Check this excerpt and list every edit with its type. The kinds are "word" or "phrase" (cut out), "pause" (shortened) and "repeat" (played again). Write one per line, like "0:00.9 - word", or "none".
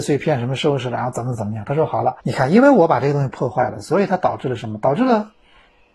0:02.2 - pause